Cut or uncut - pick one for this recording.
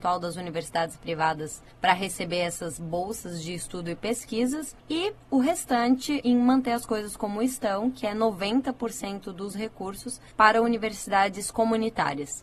cut